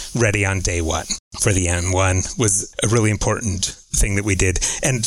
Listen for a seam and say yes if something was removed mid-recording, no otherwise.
no